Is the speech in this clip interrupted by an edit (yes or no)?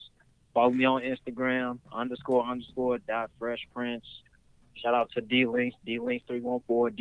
no